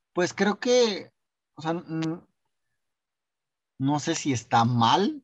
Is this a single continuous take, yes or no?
yes